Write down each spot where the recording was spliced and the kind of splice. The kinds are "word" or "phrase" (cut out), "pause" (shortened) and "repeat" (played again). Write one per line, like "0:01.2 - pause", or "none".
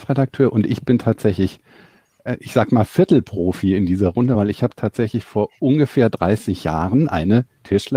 none